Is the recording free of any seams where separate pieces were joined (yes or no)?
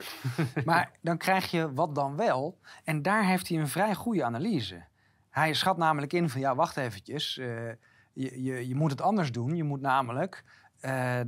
yes